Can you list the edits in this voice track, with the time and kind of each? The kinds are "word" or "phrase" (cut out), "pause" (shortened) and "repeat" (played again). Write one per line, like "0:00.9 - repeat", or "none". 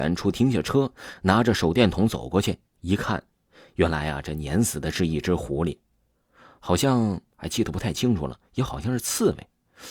none